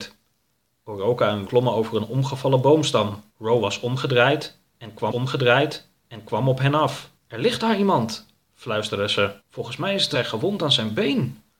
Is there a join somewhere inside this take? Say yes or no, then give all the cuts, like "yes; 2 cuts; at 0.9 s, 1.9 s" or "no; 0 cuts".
yes; 6 cuts; at 1.5 s, 3.3 s, 5.1 s, 7.2 s, 9.4 s, 10.1 s